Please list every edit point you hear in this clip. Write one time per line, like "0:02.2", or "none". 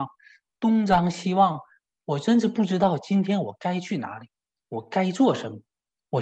none